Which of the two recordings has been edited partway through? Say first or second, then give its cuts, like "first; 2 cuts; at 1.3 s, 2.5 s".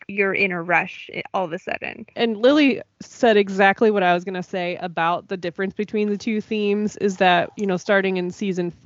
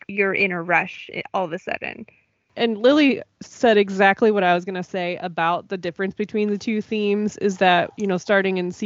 first; 1 cut; at 2.1 s